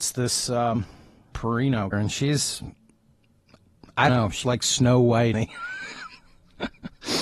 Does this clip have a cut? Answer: yes; 5 cuts; at 1.3 s, 1.9 s, 4.1 s, 4.4 s, 5.3 s

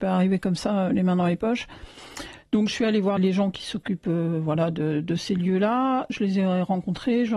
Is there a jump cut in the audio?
yes; 1 cut; at 3.2 s

